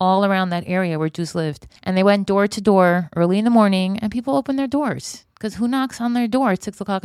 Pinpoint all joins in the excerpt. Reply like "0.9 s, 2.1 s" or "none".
1.8 s

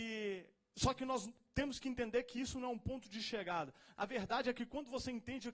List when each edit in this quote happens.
none

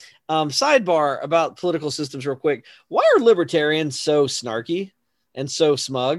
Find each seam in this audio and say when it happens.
none

